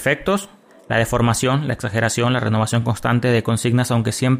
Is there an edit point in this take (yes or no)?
no